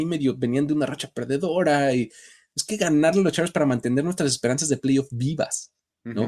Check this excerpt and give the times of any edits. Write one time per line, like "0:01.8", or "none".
none